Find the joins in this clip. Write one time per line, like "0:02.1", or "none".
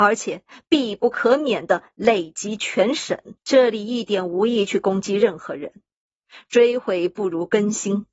0:03.4